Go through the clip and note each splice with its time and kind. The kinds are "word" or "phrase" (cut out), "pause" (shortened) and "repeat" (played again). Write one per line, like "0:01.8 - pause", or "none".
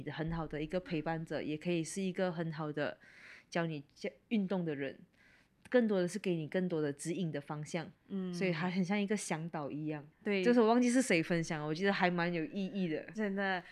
0:07.9 - pause
0:10.1 - pause